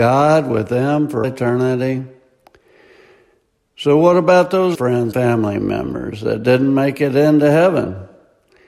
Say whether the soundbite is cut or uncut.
cut